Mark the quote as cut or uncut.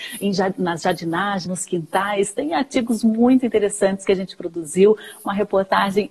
cut